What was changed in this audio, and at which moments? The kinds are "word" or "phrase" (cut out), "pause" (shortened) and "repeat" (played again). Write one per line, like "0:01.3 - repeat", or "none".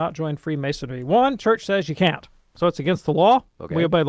none